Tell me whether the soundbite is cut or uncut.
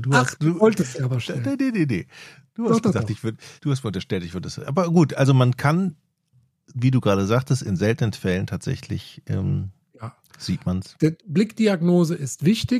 cut